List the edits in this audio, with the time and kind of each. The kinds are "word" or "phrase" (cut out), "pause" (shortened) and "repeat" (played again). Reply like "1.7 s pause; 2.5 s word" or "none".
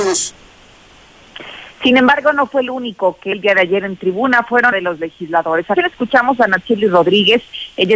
3.3 s word; 4.7 s phrase; 5.8 s word